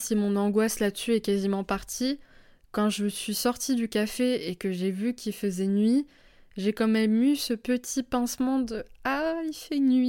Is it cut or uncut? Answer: uncut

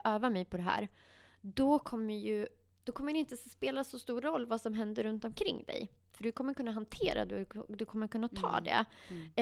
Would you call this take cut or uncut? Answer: uncut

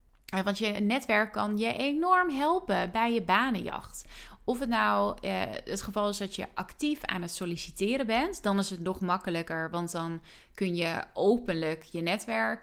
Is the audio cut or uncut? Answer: uncut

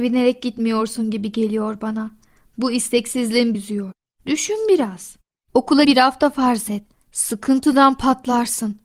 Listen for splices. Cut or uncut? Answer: cut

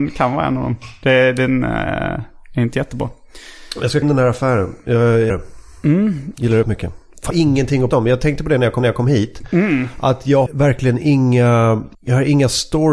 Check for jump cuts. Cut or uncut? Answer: cut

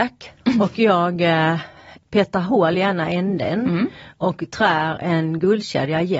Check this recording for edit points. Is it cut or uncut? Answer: uncut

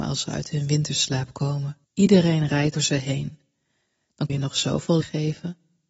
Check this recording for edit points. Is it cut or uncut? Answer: cut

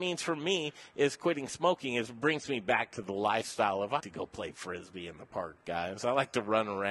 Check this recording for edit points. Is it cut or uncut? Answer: cut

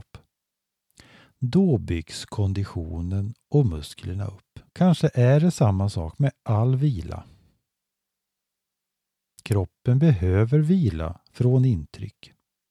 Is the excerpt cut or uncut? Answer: cut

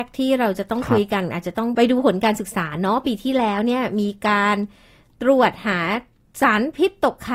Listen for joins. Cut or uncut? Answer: uncut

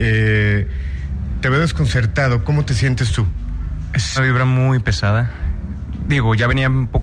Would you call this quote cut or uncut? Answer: cut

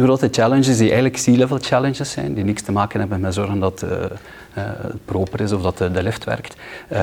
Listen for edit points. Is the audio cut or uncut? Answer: uncut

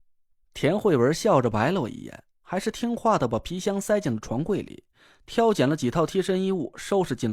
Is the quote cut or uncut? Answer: uncut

